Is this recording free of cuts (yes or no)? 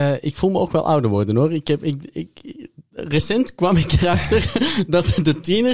yes